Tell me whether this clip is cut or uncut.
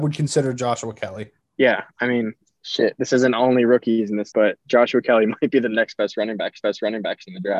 cut